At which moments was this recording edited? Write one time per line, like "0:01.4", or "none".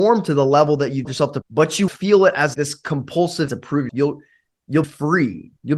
0:01.0
0:01.4
0:01.9
0:02.5
0:03.5
0:03.9
0:04.8